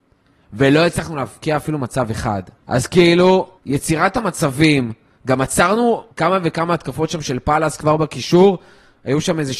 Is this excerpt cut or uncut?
cut